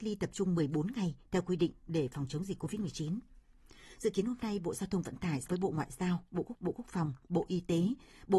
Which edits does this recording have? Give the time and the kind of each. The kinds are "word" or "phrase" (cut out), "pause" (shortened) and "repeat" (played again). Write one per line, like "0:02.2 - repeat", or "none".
0:05.5 - word
0:06.5 - repeat